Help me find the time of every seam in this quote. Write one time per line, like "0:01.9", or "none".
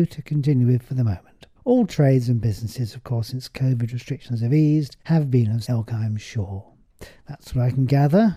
0:01.6
0:05.0
0:05.6

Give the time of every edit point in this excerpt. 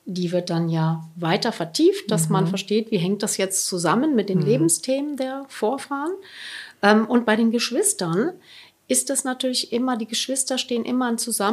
none

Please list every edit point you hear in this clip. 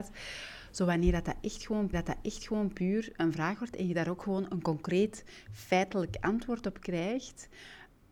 0:01.9

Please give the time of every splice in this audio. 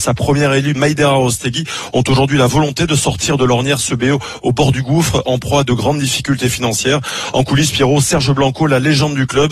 none

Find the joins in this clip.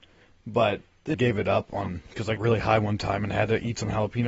0:01.1
0:02.4

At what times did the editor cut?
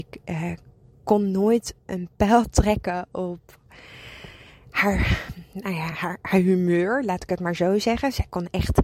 none

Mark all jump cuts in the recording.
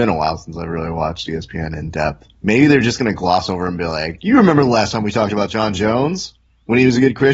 0:02.3

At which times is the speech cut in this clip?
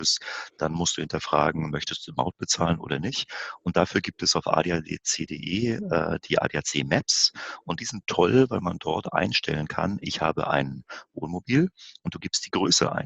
none

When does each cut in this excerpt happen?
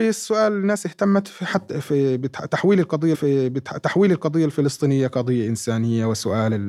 0:03.1

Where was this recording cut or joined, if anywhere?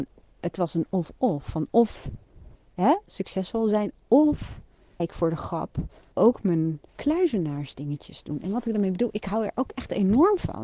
0:02.6
0:05.0
0:06.1
0:06.9

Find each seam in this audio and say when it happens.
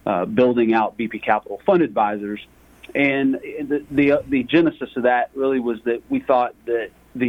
none

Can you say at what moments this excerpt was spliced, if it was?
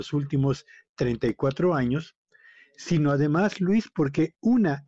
none

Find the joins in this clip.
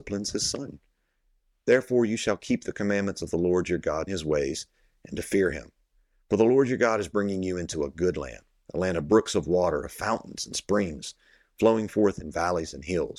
0:04.1

